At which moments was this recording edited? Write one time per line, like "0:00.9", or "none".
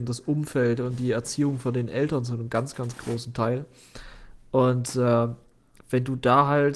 none

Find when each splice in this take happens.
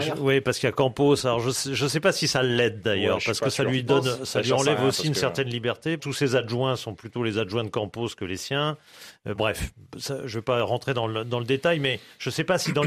0:06.0
0:09.4

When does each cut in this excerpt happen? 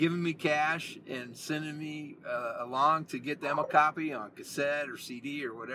none

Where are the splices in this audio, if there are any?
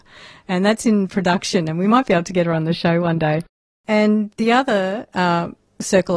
0:03.5

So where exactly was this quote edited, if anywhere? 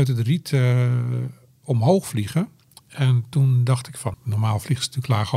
0:04.1

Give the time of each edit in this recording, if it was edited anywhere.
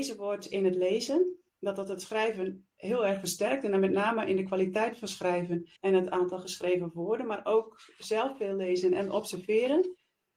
0:01.5
0:05.8

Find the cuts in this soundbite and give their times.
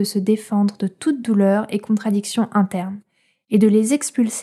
none

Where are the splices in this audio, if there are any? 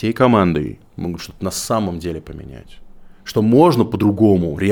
0:03.2

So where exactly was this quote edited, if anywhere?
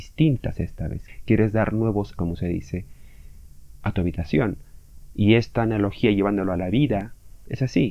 0:02.1

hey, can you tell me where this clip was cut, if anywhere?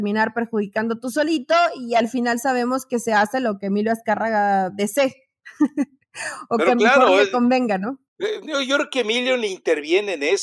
0:08.1

